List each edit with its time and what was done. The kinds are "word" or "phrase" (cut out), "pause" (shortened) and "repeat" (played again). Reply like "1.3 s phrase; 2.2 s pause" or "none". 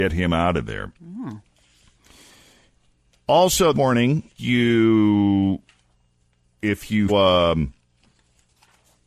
3.7 s word; 4.4 s word; 7.1 s word